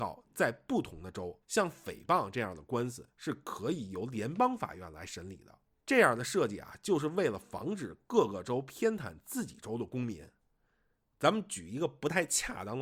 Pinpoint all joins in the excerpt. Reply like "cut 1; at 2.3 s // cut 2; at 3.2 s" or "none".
cut 1; at 1.4 s // cut 2; at 5.8 s